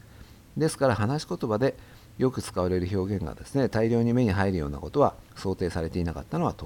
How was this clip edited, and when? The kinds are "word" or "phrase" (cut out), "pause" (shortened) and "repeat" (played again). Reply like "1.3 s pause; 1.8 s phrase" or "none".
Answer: 5.3 s pause